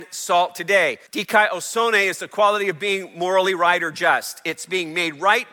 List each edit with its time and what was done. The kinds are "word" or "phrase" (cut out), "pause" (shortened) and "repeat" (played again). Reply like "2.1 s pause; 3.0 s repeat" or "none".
1.1 s pause

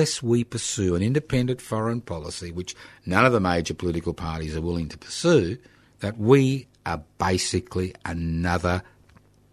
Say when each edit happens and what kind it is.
5.8 s pause

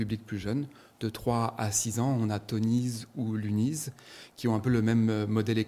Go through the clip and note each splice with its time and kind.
none

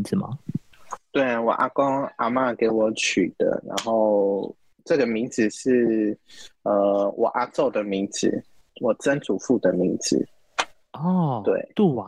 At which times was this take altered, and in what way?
none

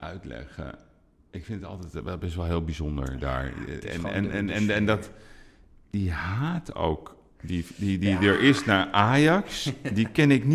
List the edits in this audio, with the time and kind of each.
none

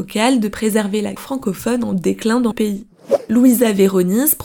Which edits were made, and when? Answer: 1.2 s word; 2.5 s word

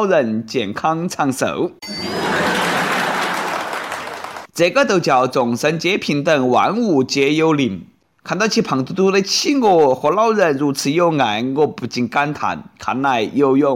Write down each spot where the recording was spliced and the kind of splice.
none

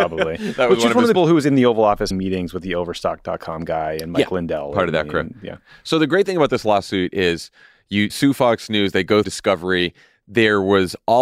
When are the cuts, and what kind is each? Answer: 1.1 s word; 2.1 s word; 8.1 s word; 9.2 s word

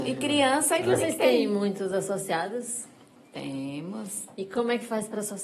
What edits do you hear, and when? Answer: none

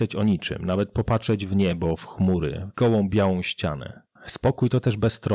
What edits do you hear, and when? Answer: none

